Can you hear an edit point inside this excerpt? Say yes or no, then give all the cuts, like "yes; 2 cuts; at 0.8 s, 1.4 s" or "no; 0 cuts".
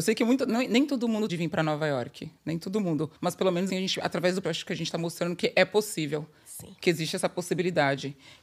yes; 4 cuts; at 1.3 s, 3.2 s, 3.7 s, 4.4 s